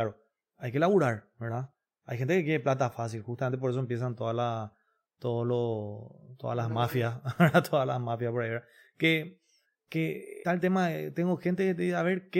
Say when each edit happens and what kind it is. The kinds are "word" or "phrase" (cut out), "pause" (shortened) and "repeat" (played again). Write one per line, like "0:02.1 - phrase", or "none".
0:10.4 - word